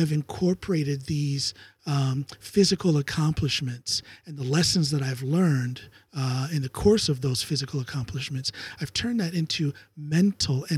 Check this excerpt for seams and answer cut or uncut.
uncut